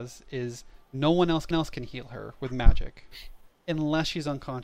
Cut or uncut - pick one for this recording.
cut